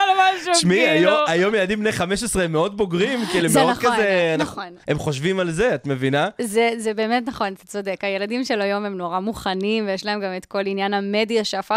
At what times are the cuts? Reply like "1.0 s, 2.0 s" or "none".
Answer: 4.8 s